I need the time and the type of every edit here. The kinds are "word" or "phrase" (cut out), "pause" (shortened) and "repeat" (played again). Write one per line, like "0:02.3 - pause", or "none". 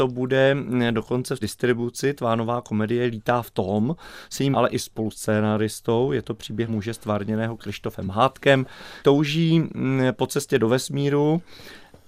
0:01.4 - word
0:04.5 - word
0:06.7 - word
0:09.0 - word